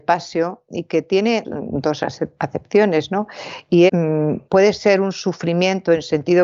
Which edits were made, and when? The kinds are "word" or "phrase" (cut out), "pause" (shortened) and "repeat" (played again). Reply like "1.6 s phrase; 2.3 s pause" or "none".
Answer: 1.4 s word; 3.9 s word; 4.5 s word